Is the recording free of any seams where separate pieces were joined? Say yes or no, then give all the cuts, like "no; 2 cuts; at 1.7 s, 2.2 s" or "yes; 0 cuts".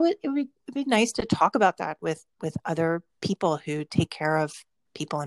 no; 1 cut; at 3.1 s